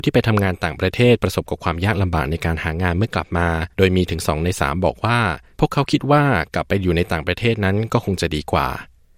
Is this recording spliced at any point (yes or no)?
yes